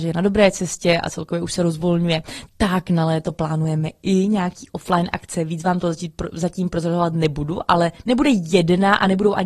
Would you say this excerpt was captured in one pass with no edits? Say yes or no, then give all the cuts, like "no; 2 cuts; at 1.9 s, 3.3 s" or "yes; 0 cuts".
yes; 0 cuts